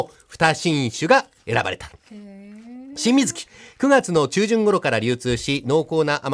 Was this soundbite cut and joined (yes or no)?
no